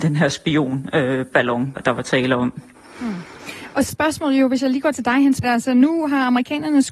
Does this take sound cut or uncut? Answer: cut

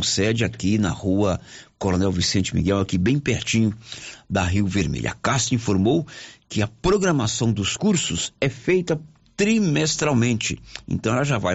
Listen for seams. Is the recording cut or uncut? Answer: uncut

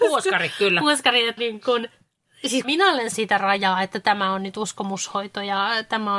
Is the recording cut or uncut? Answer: cut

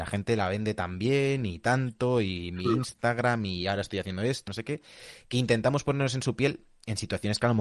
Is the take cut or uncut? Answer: cut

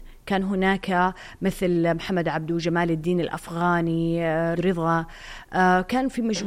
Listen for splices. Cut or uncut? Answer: cut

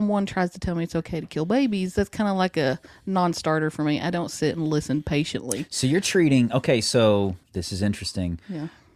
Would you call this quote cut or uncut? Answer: cut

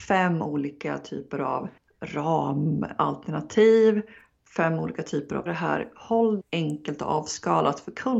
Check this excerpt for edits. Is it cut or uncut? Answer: cut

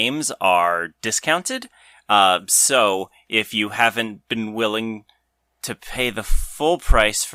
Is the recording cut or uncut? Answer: uncut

